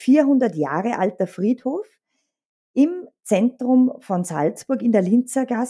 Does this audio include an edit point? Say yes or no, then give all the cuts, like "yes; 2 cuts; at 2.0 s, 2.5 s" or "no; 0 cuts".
no; 0 cuts